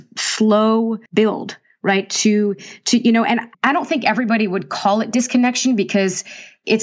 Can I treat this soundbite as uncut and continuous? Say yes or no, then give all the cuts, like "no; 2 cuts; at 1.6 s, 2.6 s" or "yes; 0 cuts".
no; 2 cuts; at 1.1 s, 3.5 s